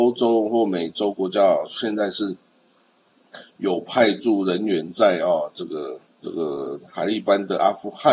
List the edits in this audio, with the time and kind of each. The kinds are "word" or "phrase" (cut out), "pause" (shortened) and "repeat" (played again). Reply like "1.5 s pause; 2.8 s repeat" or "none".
6.1 s pause